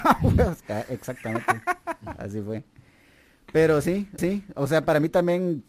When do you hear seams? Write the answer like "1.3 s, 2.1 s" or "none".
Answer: 4.2 s